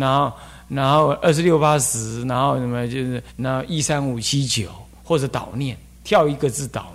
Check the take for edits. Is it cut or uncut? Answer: cut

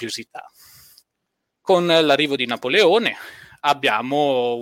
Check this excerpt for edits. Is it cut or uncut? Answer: uncut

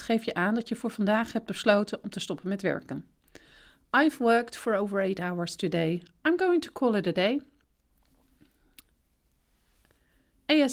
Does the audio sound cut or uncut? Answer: uncut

